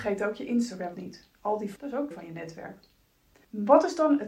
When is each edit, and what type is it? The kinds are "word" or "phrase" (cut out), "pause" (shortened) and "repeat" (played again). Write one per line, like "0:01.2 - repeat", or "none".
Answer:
0:00.9 - word
0:01.8 - word
0:02.1 - word